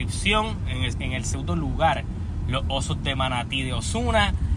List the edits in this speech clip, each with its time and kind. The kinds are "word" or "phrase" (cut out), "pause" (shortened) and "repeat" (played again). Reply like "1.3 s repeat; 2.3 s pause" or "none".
0.9 s phrase